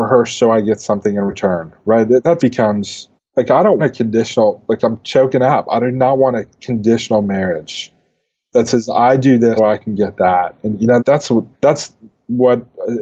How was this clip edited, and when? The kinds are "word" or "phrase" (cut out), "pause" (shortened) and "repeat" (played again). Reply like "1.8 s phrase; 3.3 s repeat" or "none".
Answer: 2.4 s word; 3.2 s pause; 3.8 s word; 9.6 s word; 11.0 s word; 11.5 s pause